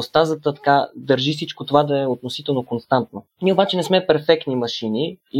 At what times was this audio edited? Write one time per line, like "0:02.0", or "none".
0:03.3